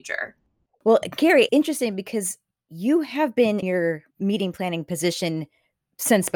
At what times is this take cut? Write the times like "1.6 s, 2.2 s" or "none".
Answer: 1.5 s, 2.5 s, 3.6 s, 4.1 s